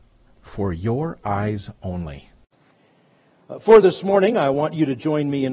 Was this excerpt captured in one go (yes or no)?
yes